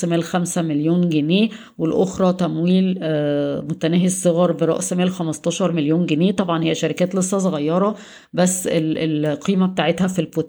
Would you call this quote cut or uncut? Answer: uncut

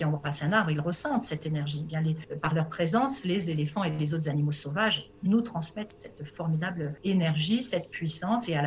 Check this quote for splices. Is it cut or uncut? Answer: uncut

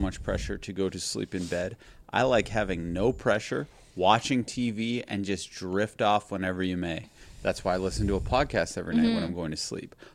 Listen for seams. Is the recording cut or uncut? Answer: uncut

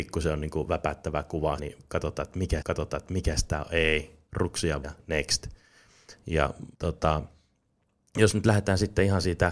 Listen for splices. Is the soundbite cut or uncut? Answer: cut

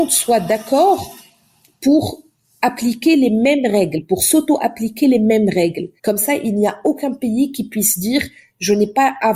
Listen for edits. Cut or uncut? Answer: cut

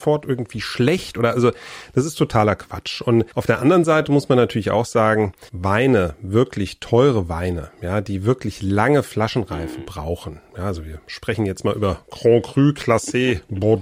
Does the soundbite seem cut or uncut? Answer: cut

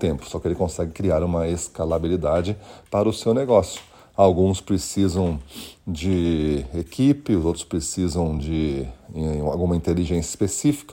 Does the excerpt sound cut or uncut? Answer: uncut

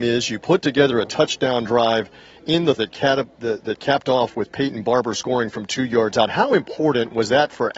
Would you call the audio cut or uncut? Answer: cut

